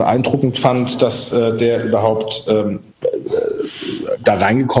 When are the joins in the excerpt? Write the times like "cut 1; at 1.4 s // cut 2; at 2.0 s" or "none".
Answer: none